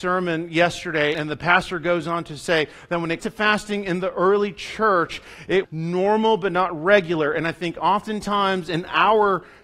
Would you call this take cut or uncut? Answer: cut